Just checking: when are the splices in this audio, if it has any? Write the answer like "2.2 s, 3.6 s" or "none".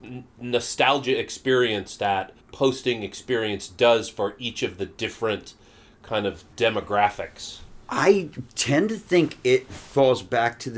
2.4 s, 6.5 s